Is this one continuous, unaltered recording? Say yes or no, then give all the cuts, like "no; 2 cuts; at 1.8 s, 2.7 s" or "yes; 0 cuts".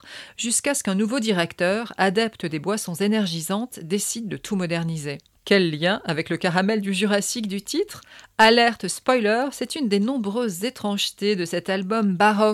yes; 0 cuts